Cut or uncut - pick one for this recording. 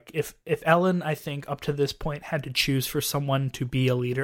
uncut